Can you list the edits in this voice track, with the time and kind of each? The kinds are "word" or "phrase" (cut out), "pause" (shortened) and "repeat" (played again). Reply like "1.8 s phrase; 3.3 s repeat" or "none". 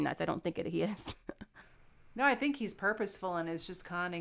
none